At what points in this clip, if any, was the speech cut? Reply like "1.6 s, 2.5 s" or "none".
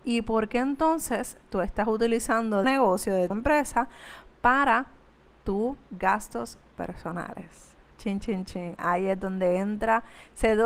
2.6 s, 3.3 s, 5.9 s, 8.2 s